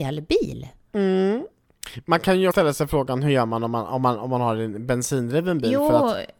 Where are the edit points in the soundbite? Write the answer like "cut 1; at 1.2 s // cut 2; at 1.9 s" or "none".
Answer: cut 1; at 2.5 s